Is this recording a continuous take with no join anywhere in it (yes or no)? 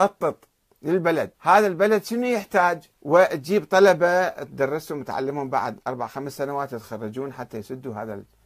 no